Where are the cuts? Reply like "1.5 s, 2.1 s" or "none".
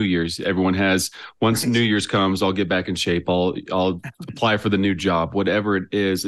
none